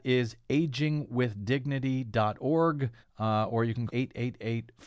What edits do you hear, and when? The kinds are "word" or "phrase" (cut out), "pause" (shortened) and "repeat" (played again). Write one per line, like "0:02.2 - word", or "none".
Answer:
0:03.0 - pause
0:03.9 - word